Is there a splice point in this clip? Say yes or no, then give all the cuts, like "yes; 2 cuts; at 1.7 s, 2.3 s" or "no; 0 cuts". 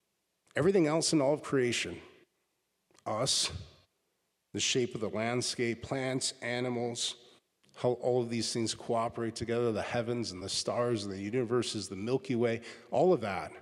no; 0 cuts